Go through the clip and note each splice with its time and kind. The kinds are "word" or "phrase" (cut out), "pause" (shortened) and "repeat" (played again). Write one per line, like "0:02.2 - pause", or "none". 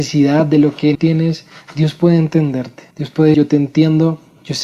0:00.9 - phrase
0:02.9 - pause
0:03.3 - word